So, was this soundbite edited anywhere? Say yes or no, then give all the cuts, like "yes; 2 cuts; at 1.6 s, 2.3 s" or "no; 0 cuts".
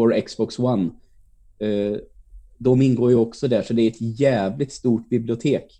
no; 0 cuts